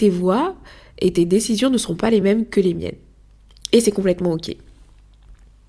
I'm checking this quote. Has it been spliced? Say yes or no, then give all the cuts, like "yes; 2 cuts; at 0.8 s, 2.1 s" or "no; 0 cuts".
no; 0 cuts